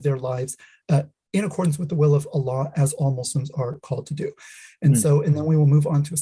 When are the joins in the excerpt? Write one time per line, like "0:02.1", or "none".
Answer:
none